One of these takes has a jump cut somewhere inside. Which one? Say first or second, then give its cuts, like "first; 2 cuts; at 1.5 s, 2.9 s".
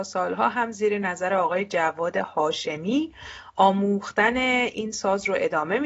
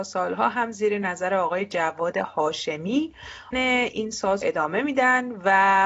second; 2 cuts; at 3.5 s, 4.4 s